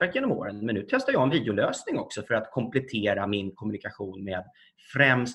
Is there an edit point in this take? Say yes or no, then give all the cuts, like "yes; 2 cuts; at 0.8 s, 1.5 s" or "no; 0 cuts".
no; 0 cuts